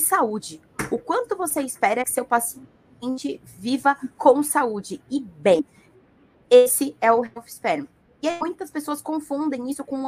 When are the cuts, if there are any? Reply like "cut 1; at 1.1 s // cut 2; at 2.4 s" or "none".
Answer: none